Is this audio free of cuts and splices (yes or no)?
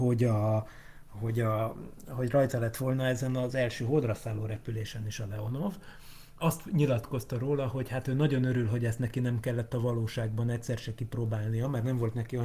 no